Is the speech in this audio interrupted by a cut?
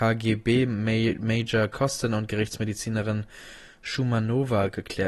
no; 0 cuts

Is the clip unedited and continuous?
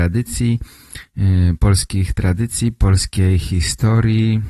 yes; 0 cuts

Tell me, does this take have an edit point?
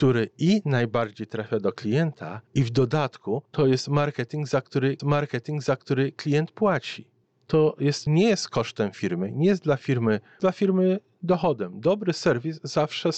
yes; 6 cuts; at 2.5 s, 3.5 s, 5.0 s, 7.2 s, 8.1 s, 10.4 s

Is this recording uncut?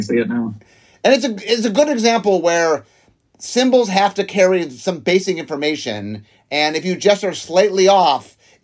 yes; 0 cuts

